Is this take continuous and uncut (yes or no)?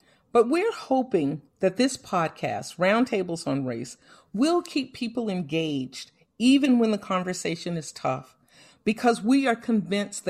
yes